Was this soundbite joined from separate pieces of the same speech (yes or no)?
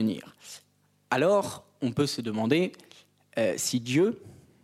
no